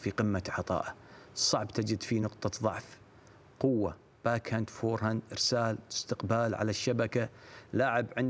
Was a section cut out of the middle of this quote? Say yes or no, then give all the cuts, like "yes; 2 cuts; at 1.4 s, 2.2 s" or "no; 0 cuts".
no; 0 cuts